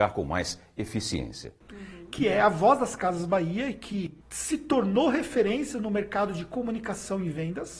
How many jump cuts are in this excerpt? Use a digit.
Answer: 2